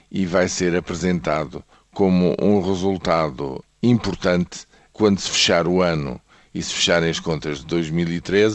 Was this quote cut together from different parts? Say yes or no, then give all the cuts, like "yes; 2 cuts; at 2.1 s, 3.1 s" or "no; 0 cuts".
no; 0 cuts